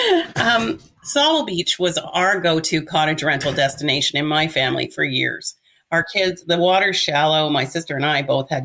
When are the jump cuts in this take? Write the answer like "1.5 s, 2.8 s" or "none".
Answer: none